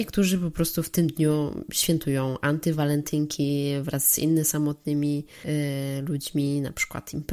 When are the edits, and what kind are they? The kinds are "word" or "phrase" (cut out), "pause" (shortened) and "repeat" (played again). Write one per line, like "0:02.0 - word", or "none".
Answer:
none